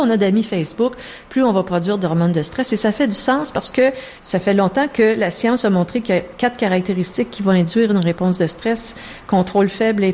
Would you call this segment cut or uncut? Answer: cut